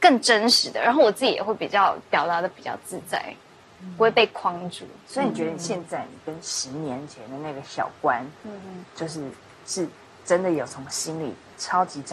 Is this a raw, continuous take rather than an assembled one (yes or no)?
yes